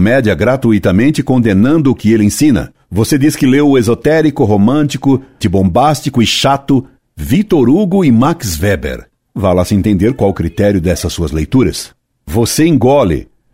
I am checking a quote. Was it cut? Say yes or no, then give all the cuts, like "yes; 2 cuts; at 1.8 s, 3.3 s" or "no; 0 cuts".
yes; 1 cut; at 5.4 s